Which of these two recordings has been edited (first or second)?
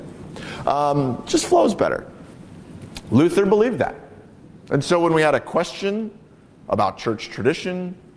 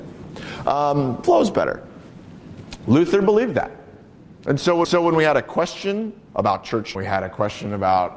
second